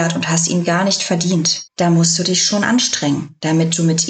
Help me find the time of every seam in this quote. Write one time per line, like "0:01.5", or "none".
0:01.7